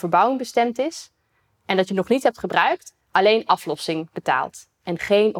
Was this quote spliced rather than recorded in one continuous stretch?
no; 0 cuts

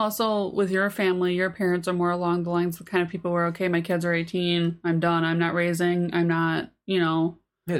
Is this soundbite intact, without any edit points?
yes; 0 cuts

